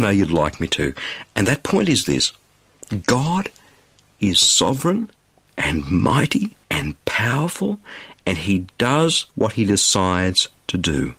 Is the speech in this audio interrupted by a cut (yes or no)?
yes